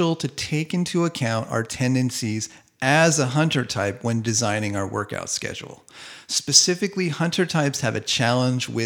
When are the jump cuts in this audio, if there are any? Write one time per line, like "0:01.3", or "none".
none